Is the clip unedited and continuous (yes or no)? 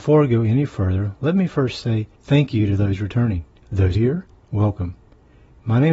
no